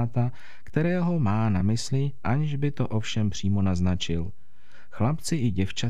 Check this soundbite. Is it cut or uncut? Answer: uncut